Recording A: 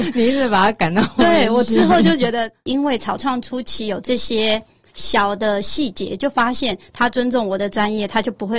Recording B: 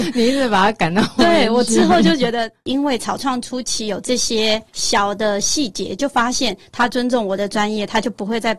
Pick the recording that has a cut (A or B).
B